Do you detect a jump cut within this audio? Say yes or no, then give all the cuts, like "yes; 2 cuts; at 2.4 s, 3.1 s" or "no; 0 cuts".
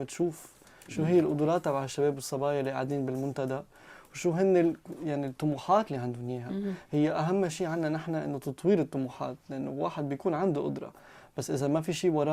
no; 0 cuts